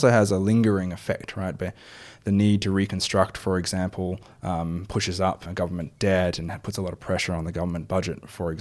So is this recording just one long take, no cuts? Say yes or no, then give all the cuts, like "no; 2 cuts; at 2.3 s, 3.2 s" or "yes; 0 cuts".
no; 1 cut; at 5.5 s